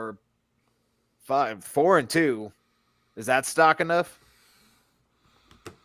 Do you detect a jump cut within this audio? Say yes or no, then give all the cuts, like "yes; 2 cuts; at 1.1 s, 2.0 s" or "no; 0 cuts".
no; 0 cuts